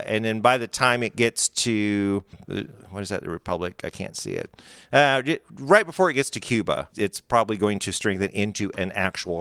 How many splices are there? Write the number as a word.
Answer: two